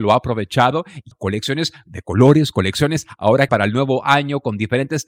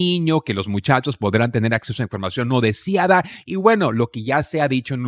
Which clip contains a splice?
first; 2 cuts; at 1.1 s, 3.5 s

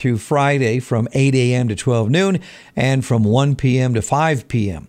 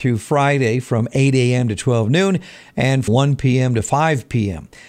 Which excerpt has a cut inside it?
second; 1 cut; at 3.1 s

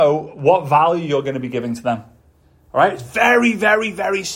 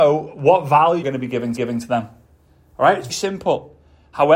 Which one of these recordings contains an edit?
second; 3 cuts; at 1.0 s, 1.6 s, 3.1 s

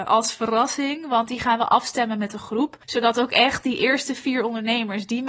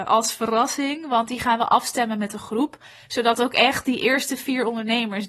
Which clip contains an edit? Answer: first; 1 cut; at 2.8 s

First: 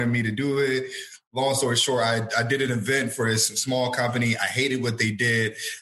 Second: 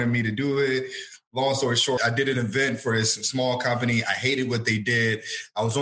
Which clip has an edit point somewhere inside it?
second; 1 cut; at 2.0 s

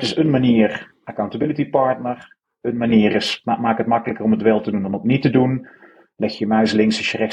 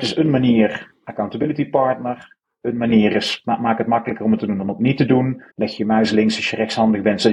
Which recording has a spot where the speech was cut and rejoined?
second; 2 cuts; at 4.4 s, 5.5 s

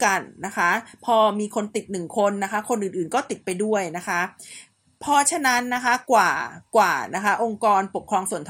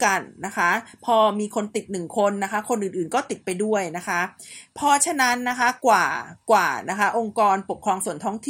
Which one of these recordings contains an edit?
second; 1 cut; at 4.7 s

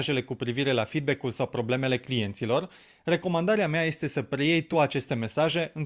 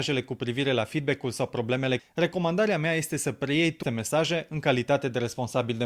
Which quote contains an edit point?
second; 2 cuts; at 2.0 s, 3.8 s

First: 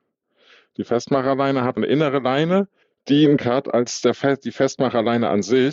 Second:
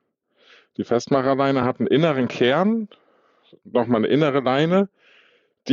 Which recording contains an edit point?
first; 3 cuts; at 1.8 s, 2.8 s, 3.4 s

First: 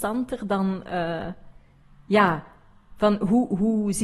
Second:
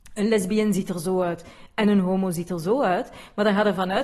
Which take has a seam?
first; 1 cut; at 1.8 s

